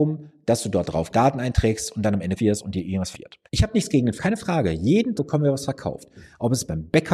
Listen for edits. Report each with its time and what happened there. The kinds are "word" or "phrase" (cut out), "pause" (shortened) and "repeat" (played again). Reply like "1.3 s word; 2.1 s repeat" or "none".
1.1 s phrase; 2.4 s word; 3.1 s word; 3.5 s pause; 4.2 s word; 5.1 s word